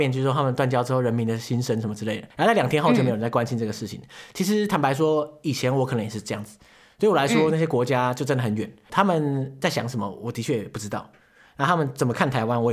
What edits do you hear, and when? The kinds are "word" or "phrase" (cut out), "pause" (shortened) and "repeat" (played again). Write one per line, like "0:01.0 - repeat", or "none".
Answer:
0:02.3 - pause